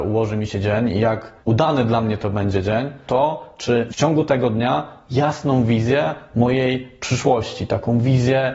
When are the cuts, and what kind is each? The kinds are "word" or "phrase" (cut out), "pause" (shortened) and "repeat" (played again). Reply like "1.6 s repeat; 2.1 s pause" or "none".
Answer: 1.4 s pause; 3.1 s word; 3.9 s phrase